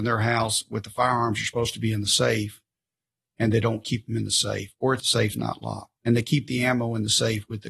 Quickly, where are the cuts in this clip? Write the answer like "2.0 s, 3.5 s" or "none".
5.0 s, 6.0 s